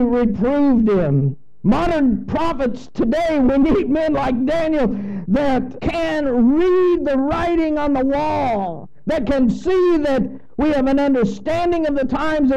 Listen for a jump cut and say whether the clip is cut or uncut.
uncut